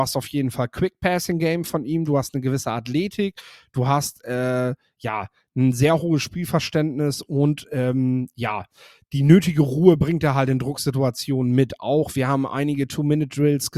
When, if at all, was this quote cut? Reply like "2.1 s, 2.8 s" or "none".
none